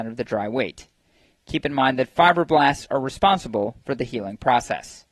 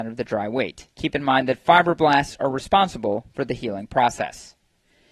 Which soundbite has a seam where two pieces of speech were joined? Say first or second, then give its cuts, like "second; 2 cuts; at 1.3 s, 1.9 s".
second; 1 cut; at 0.9 s